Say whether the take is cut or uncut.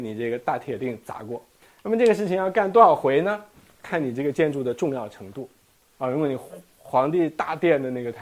uncut